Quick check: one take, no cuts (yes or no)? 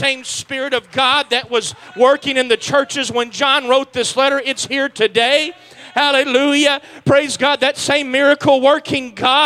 yes